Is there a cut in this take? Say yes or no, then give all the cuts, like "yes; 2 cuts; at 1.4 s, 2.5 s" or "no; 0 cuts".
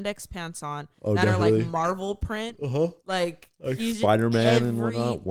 yes; 1 cut; at 3.0 s